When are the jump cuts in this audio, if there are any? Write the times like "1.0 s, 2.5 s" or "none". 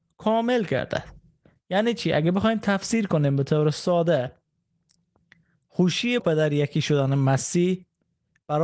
6.2 s